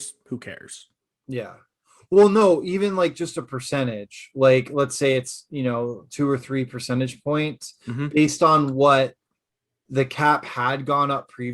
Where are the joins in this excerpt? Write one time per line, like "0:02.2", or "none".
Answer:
none

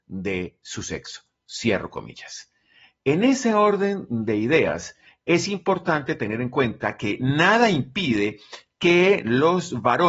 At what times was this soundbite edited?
none

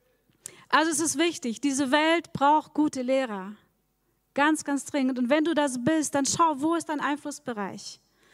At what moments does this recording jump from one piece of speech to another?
none

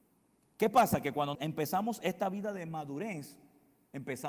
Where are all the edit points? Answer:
0:01.3

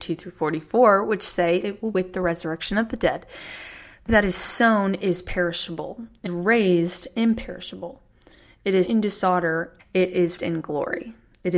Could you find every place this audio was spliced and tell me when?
0:01.6
0:01.9
0:04.1
0:06.3
0:08.8
0:09.8
0:10.4

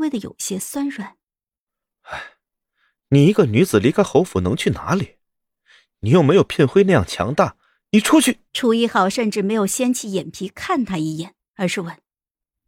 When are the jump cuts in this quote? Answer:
0:08.5

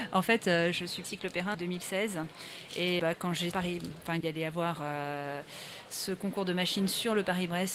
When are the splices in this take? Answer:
0:01.0
0:01.5
0:03.0
0:03.5
0:04.2

